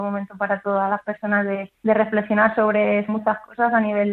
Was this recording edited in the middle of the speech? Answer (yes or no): yes